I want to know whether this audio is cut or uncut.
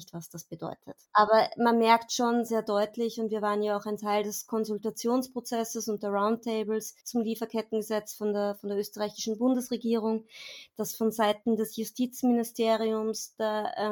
cut